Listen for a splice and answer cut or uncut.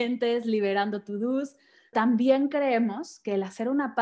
cut